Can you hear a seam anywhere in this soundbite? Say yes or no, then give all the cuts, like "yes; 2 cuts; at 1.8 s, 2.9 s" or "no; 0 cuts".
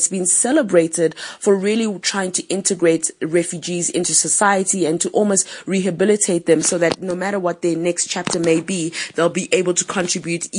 no; 0 cuts